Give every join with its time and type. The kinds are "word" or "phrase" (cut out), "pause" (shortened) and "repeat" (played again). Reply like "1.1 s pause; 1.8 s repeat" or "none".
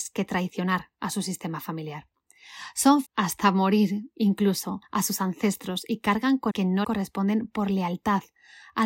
3.1 s word; 4.8 s pause; 6.5 s word; 6.8 s word